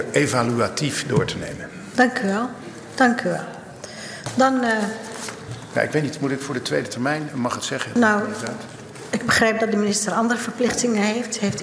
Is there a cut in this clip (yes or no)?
no